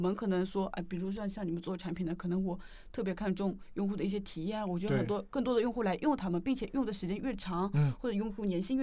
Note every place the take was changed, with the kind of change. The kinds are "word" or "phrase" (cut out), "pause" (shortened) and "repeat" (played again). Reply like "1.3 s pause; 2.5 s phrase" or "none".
none